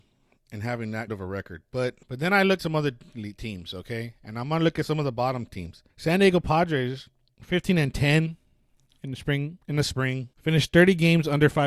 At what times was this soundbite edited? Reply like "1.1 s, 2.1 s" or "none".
1.1 s, 2.0 s, 2.6 s, 5.9 s, 7.3 s, 9.6 s, 10.3 s

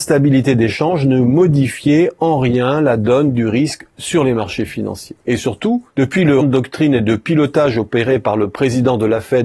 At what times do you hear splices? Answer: 5.2 s, 5.9 s, 6.4 s

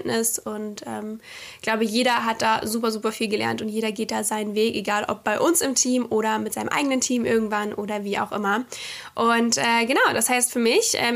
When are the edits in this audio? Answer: none

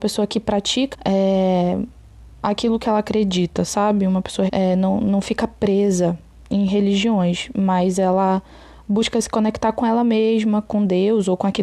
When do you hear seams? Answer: 0.9 s, 4.5 s

